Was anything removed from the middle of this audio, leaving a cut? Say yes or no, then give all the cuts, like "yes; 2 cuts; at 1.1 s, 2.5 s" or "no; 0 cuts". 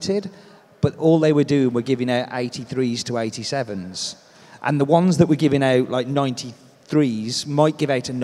no; 0 cuts